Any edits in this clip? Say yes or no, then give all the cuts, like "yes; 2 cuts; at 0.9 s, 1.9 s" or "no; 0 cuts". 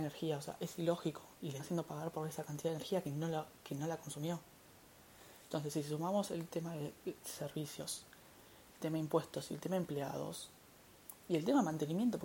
yes; 3 cuts; at 1.6 s, 3.6 s, 8.7 s